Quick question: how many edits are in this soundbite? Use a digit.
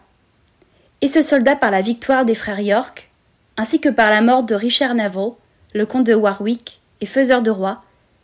0